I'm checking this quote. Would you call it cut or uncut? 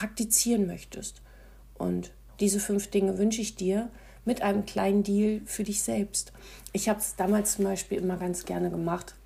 uncut